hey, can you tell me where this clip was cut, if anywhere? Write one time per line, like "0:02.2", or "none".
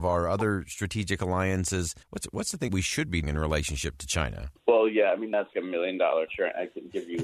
0:02.0
0:02.7
0:03.2
0:04.6
0:05.5
0:06.3